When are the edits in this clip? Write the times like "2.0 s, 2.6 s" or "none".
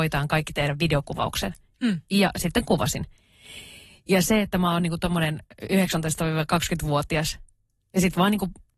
none